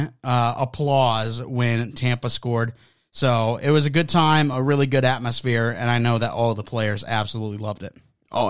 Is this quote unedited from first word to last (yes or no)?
yes